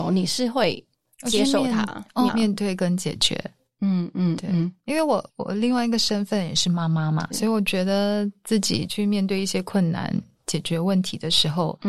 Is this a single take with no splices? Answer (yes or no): no